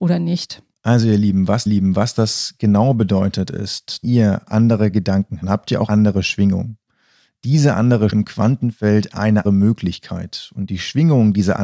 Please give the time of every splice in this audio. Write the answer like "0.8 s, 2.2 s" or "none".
1.7 s, 4.0 s, 5.4 s, 5.9 s, 8.1 s, 9.4 s